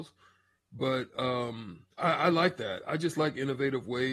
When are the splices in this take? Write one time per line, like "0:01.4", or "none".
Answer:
0:01.9